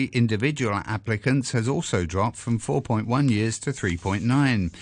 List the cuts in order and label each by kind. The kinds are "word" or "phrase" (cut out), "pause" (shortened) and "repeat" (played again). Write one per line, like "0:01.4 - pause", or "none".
none

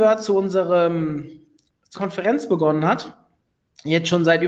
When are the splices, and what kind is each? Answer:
0:01.9 - word

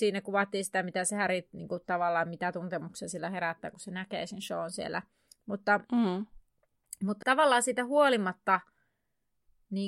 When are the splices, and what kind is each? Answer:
0:07.2 - word

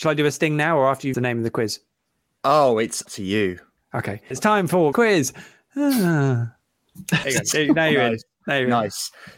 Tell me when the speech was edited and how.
0:01.1 - word
0:03.1 - word
0:04.3 - word
0:04.9 - word
0:07.2 - word

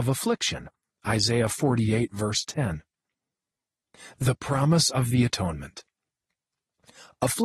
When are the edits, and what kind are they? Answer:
none

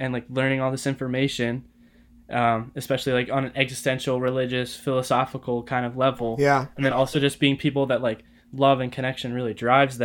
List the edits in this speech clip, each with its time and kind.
none

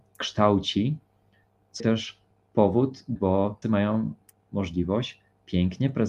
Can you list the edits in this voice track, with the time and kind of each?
0:01.8 - word
0:03.2 - word
0:03.6 - word

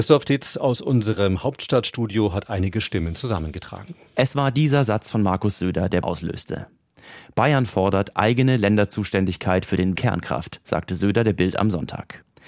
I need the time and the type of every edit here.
0:06.0 - phrase
0:08.1 - word
0:10.0 - phrase

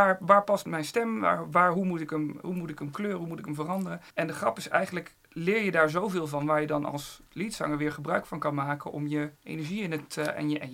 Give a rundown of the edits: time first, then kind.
0:04.1 - pause
0:05.2 - pause
0:09.4 - pause

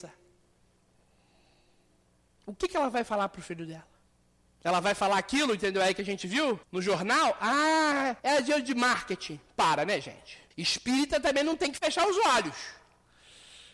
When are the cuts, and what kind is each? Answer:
0:04.0 - pause
0:06.6 - pause
0:08.2 - pause
0:10.5 - pause

